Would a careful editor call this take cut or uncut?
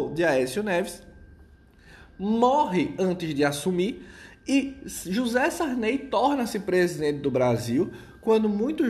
uncut